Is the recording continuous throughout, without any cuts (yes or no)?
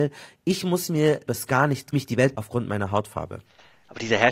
no